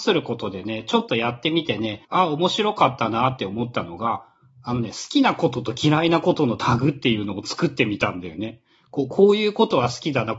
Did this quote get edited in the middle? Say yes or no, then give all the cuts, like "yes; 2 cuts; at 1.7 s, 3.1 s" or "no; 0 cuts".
yes; 1 cut; at 2.0 s